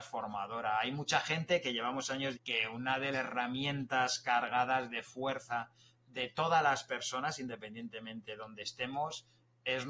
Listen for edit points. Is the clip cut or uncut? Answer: cut